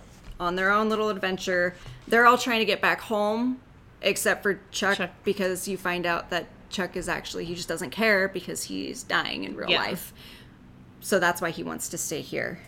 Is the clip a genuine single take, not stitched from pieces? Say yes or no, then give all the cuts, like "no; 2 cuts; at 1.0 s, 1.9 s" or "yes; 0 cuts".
yes; 0 cuts